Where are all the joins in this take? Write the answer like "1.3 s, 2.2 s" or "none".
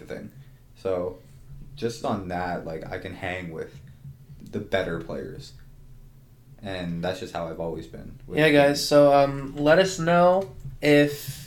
2.0 s, 4.4 s